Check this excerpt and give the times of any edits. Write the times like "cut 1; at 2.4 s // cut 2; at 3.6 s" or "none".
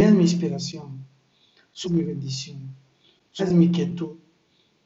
cut 1; at 1.8 s // cut 2; at 3.4 s